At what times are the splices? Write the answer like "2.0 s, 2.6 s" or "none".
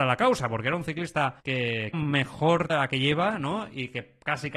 1.4 s, 1.9 s, 2.7 s